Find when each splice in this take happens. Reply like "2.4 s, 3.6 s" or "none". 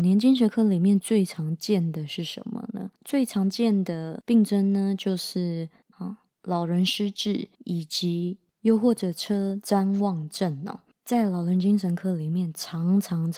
3.0 s, 5.9 s, 7.5 s, 8.5 s

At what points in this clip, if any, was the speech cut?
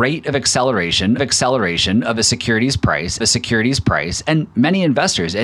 1.2 s, 3.2 s

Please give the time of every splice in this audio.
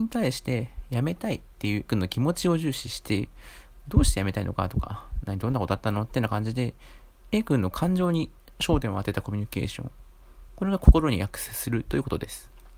1.9 s

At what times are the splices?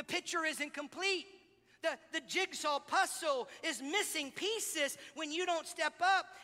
none

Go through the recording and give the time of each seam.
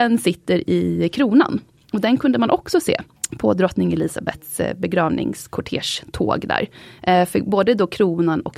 3.2 s

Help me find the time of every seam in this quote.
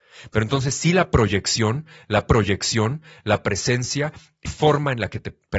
2.3 s, 4.5 s

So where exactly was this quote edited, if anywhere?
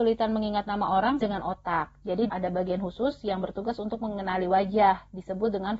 1.2 s, 2.3 s

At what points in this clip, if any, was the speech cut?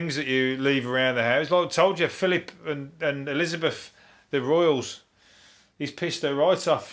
none

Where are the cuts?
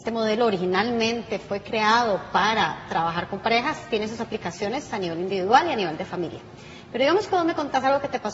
none

